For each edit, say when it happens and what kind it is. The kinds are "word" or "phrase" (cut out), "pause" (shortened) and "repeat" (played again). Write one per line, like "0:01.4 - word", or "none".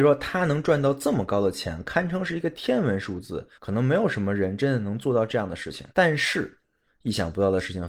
0:03.5 - pause
0:05.9 - pause